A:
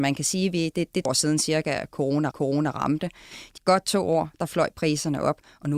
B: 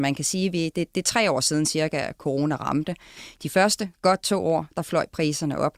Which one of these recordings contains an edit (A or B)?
A